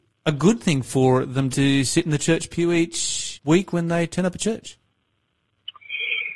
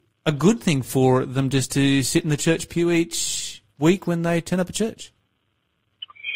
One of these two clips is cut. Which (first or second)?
first